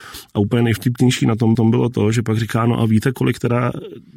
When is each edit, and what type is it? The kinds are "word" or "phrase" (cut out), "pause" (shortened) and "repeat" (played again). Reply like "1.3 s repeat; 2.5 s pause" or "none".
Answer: 1.5 s repeat